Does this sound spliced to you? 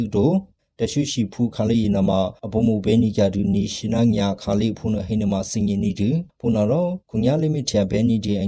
yes; 1 cut; at 7.0 s

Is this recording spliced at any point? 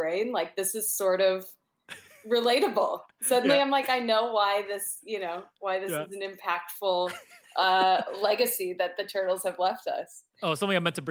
no; 0 cuts

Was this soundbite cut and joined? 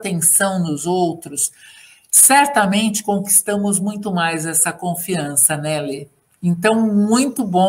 no; 0 cuts

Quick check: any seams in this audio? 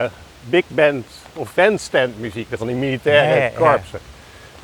yes; 2 cuts; at 1.5 s, 2.6 s

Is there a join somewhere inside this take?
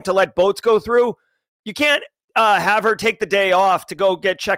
no; 0 cuts

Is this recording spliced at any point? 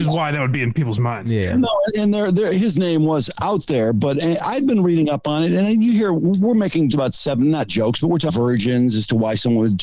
yes; 2 cuts; at 6.9 s, 8.3 s

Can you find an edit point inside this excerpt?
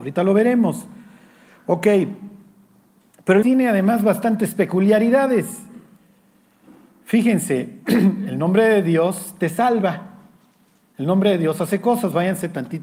yes; 1 cut; at 3.4 s

